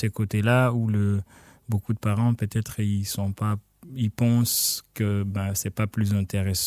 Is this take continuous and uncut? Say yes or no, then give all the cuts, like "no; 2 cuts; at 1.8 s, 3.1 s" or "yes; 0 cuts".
yes; 0 cuts